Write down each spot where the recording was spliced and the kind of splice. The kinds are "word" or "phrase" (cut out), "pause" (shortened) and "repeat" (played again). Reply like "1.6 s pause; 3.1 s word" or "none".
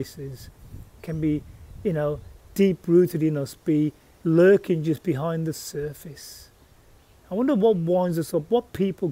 none